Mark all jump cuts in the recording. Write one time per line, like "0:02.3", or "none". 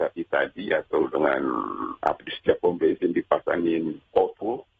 none